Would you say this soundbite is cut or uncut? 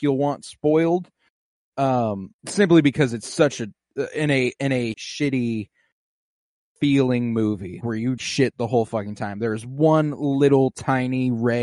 cut